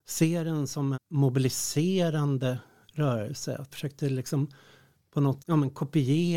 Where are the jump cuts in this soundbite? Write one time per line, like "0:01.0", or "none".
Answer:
0:00.9
0:03.7
0:05.4